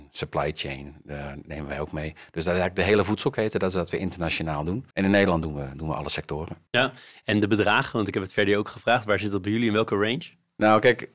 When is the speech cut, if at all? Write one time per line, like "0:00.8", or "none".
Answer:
0:04.9
0:06.7